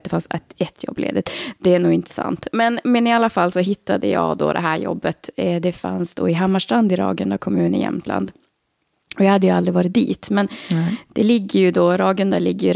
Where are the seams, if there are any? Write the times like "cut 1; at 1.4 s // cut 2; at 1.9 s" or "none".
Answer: none